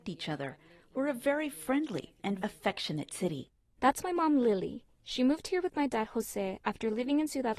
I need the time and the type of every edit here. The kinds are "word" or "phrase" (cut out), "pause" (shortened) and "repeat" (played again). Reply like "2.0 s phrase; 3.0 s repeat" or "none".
2.4 s word